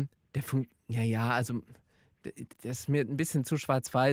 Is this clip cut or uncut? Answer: cut